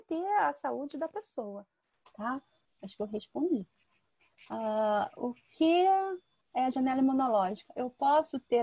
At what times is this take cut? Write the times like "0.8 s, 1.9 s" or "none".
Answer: none